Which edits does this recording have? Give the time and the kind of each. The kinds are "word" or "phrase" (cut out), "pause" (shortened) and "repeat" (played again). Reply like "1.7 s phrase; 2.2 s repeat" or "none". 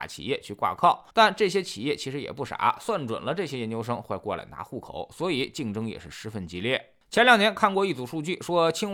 1.1 s pause